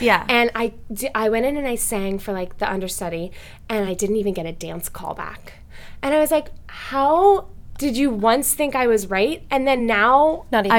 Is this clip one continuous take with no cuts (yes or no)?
yes